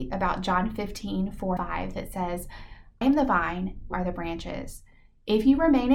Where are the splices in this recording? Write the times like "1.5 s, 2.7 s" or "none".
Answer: 1.6 s, 3.0 s, 3.9 s